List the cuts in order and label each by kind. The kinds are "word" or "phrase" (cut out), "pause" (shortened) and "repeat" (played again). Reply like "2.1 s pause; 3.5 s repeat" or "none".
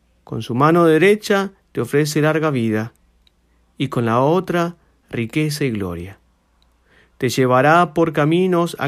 none